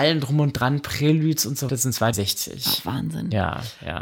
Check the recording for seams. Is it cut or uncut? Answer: cut